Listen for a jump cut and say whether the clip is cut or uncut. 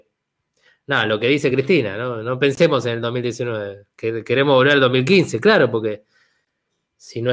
uncut